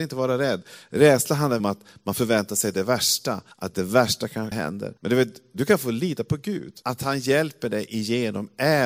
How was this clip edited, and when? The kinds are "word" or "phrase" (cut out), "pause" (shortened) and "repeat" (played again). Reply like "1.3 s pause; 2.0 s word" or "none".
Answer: 1.6 s phrase; 3.5 s pause; 4.5 s word; 5.0 s pause; 6.8 s pause